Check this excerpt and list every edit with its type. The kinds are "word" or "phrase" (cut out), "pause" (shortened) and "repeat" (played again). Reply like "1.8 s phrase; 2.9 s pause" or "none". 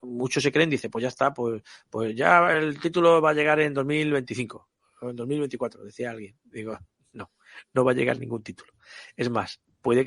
none